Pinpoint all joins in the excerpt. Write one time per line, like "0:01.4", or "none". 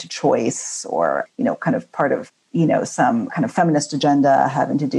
0:01.3
0:03.3